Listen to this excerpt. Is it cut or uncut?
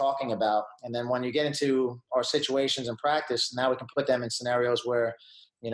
uncut